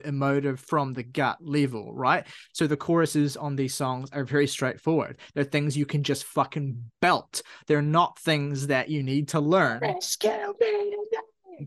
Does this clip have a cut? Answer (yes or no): no